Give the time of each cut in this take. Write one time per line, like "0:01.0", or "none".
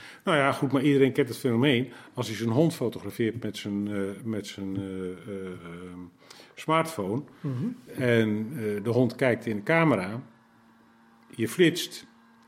none